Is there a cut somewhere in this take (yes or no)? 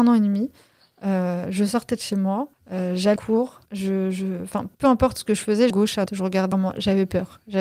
yes